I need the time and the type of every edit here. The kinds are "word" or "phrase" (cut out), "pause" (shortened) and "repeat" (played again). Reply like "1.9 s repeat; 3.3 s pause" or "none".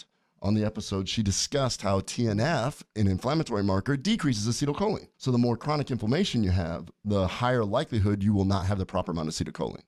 5.1 s pause